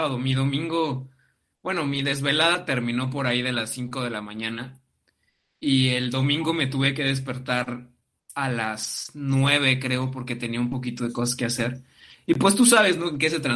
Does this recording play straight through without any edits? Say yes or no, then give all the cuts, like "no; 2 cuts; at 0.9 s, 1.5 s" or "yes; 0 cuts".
yes; 0 cuts